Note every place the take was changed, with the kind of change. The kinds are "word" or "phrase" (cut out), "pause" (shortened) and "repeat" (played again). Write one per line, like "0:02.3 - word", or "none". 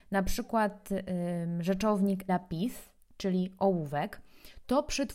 0:02.3 - word